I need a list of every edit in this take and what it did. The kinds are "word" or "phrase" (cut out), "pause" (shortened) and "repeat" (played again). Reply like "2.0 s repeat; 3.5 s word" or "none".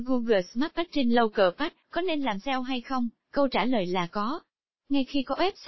1.8 s pause; 3.2 s pause